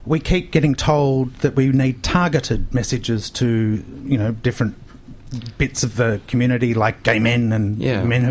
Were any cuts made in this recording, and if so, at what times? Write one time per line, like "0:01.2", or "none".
none

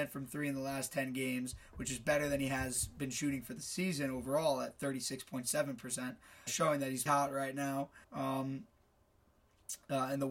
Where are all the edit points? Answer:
0:06.5
0:07.1
0:08.0

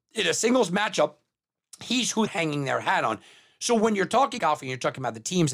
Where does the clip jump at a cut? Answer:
0:02.3
0:04.4

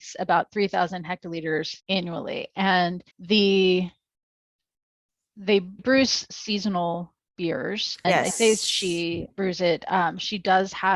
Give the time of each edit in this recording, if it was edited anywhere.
0:01.8
0:03.1
0:05.8
0:08.0
0:09.3

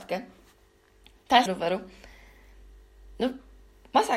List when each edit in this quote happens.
0:01.5

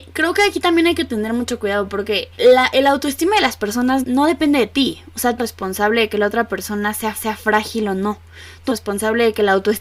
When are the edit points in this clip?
0:02.3
0:04.0
0:05.4
0:07.1
0:08.7

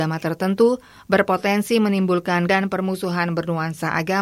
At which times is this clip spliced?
0:02.5

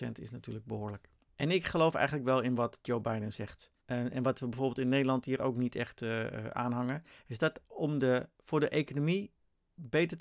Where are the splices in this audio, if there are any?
0:01.3
0:03.8

